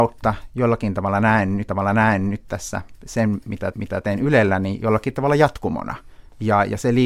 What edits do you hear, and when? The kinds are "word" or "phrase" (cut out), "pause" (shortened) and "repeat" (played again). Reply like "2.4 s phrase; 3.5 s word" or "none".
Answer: 1.7 s repeat; 3.7 s repeat